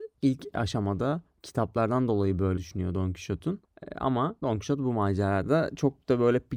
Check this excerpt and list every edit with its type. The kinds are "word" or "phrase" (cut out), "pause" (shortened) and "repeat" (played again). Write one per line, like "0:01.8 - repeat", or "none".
0:02.6 - word